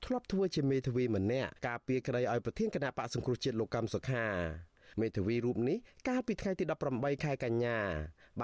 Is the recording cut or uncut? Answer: cut